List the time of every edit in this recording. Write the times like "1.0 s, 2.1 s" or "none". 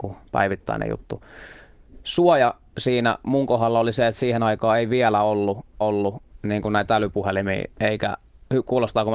5.8 s, 7.7 s

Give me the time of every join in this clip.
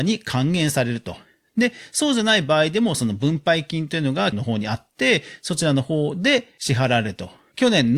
4.3 s

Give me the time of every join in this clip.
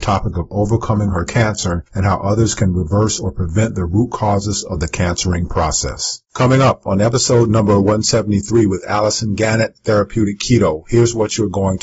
1.3 s

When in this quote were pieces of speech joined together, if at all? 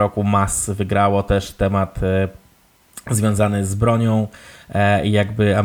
none

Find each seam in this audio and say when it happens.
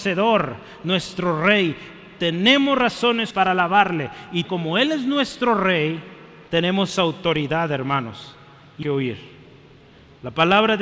3.3 s, 4.4 s, 6.5 s, 8.8 s

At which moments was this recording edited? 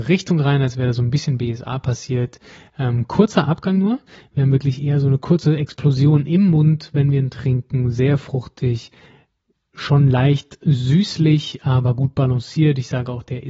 none

